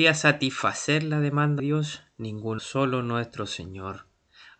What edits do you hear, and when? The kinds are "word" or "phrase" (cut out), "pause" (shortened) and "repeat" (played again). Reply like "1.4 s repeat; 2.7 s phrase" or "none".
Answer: 1.6 s word; 2.6 s word